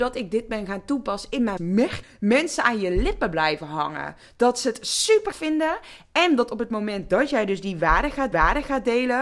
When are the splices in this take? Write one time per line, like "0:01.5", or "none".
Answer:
0:01.6
0:02.0
0:05.3
0:08.3